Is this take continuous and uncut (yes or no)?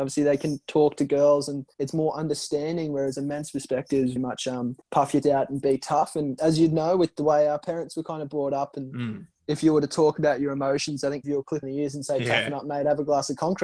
no